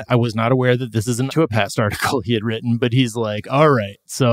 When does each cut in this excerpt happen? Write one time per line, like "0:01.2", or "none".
0:01.3